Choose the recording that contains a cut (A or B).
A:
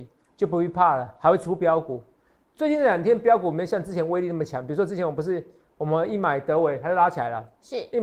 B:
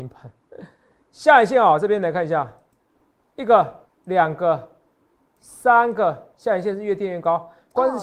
B